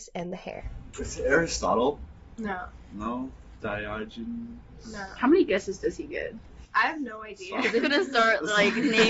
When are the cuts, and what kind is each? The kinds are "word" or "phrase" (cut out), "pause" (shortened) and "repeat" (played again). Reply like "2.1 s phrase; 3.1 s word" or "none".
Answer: 7.8 s word

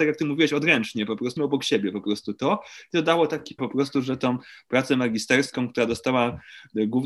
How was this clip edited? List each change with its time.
1.4 s word; 3.6 s word

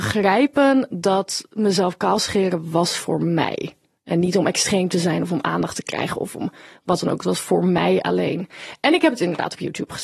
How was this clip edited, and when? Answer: none

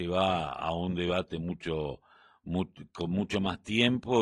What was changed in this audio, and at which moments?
none

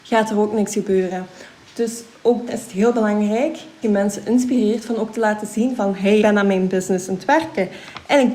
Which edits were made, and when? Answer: 2.5 s word; 3.8 s word; 6.2 s word

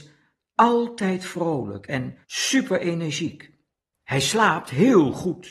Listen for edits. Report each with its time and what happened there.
2.2 s pause

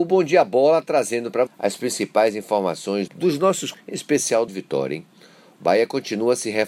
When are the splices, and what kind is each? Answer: 1.5 s word; 3.1 s word; 3.7 s word; 4.5 s word

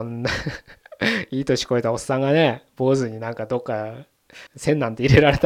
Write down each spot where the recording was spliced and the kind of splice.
4.5 s pause

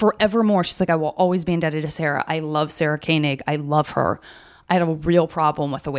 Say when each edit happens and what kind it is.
none

